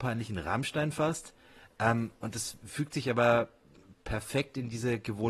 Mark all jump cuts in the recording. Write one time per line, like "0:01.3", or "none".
none